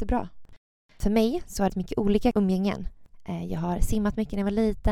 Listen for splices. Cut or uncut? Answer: cut